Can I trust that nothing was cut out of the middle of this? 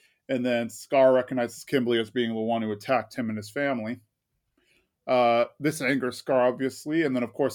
yes; 0 cuts

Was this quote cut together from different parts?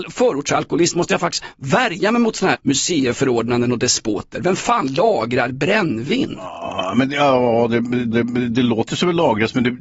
yes; 2 cuts; at 2.5 s, 8.1 s

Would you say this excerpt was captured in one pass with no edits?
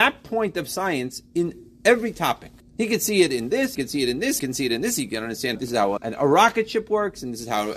no; 5 cuts; at 2.6 s, 3.7 s, 4.4 s, 5.5 s, 6.0 s

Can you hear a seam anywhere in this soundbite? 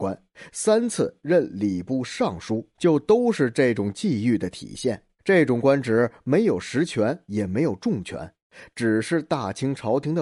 yes; 2 cuts; at 2.7 s, 5.2 s

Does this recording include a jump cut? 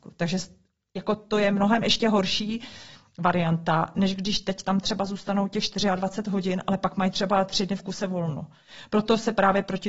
no; 0 cuts

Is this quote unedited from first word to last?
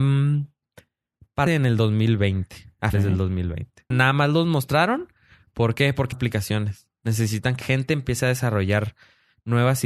no; 5 cuts; at 1.5 s, 2.9 s, 3.9 s, 6.1 s, 7.6 s

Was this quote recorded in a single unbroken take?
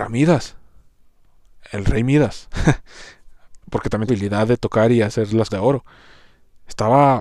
no; 3 cuts; at 3.6 s, 4.1 s, 5.5 s

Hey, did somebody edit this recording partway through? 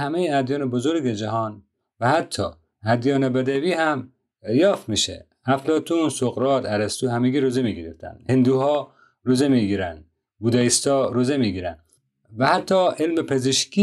no; 0 cuts

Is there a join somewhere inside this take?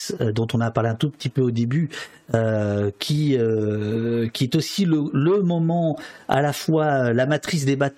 no; 0 cuts

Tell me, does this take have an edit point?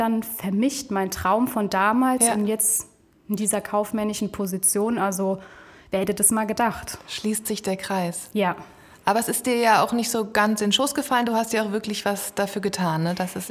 no; 0 cuts

